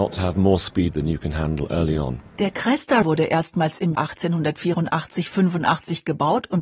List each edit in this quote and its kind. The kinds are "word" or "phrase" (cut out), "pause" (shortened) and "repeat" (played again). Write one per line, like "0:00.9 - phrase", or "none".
0:03.0 - word
0:04.0 - word